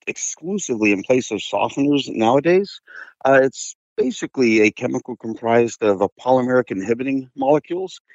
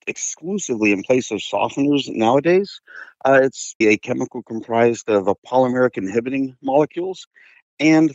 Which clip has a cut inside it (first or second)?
second